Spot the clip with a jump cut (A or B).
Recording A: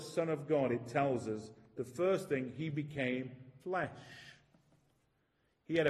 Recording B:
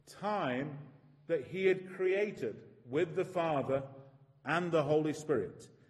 A